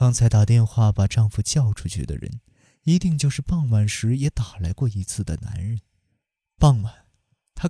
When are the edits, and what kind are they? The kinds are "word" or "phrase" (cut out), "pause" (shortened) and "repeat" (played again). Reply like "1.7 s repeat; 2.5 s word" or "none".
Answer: none